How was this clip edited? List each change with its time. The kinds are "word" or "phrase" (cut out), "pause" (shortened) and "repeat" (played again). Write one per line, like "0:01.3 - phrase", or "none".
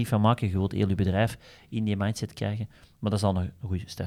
none